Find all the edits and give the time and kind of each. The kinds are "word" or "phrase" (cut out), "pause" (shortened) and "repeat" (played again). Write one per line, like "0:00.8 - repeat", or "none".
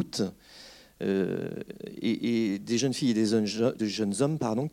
0:03.8 - word